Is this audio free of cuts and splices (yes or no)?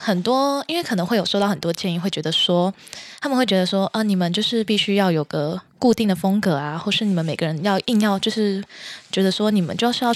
no